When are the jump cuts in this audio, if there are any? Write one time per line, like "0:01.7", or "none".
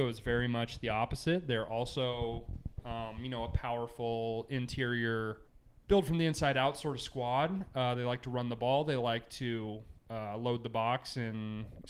0:05.5
0:10.0